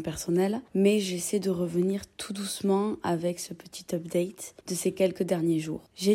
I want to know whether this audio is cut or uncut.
cut